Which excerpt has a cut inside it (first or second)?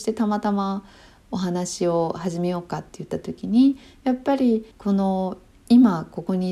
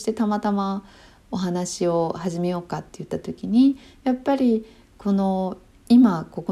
first